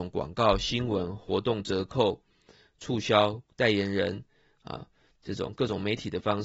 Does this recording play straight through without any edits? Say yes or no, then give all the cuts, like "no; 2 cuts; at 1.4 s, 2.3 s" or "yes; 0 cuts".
yes; 0 cuts